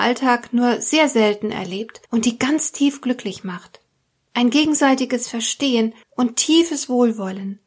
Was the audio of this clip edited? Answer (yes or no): yes